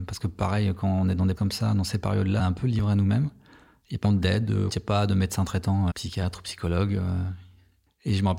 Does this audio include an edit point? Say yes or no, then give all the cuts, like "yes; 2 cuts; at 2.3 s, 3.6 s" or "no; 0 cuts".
yes; 5 cuts; at 1.4 s, 2.4 s, 4.0 s, 4.7 s, 5.9 s